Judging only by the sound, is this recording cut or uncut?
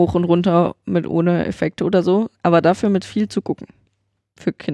uncut